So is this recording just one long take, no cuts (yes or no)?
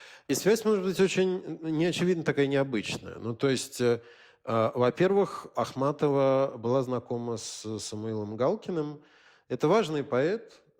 yes